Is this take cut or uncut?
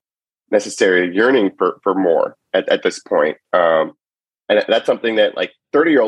uncut